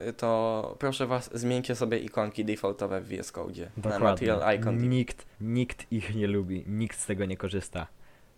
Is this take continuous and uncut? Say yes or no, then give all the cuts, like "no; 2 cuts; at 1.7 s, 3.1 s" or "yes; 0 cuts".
no; 1 cut; at 5.3 s